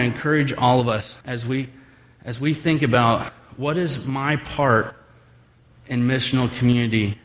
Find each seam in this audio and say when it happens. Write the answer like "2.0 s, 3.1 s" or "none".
1.2 s